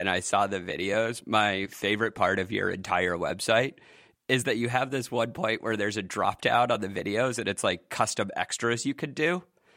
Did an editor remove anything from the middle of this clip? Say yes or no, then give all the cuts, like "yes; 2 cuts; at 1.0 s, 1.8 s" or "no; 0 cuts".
no; 0 cuts